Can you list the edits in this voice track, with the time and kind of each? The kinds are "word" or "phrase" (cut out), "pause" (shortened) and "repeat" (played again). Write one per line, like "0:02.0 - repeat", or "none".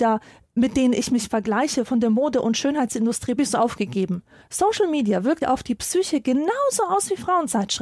0:03.4 - phrase
0:04.4 - pause
0:05.4 - word